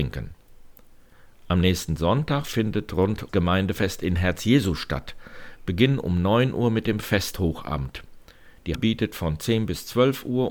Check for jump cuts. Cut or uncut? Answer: cut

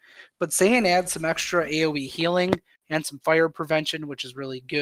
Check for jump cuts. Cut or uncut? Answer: uncut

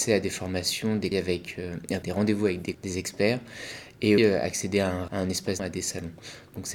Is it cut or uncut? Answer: cut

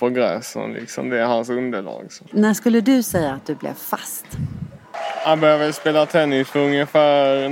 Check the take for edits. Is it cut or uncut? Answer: cut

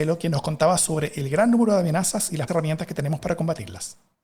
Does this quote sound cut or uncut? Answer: cut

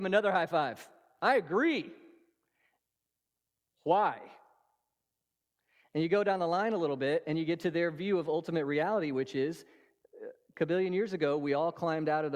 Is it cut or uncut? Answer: uncut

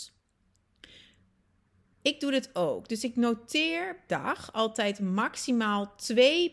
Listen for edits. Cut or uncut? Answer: cut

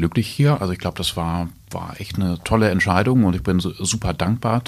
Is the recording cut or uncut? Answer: uncut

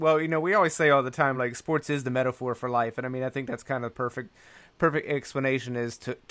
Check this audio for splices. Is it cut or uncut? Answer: uncut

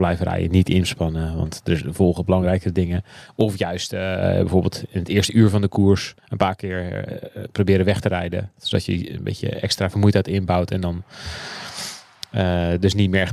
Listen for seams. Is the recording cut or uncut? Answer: cut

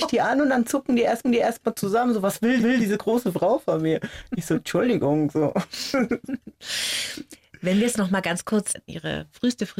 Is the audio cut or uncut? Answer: cut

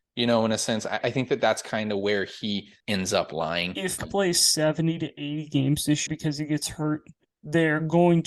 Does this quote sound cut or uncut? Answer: cut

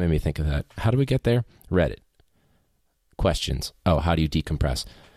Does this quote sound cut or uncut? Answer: cut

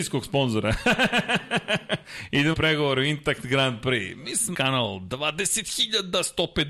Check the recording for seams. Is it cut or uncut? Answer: cut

